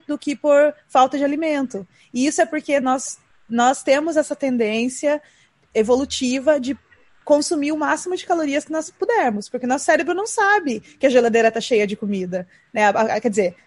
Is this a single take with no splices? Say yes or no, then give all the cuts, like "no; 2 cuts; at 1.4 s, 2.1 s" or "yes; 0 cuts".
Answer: yes; 0 cuts